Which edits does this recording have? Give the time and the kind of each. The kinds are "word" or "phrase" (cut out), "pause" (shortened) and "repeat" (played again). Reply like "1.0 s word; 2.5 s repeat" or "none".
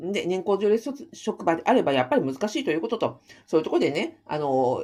none